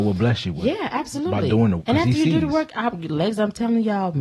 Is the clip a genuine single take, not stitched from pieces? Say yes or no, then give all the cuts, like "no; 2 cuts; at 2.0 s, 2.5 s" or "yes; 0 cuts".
no; 1 cut; at 1.8 s